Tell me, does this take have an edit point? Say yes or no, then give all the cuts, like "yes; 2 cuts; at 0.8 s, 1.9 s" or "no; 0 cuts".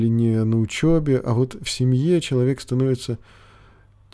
no; 0 cuts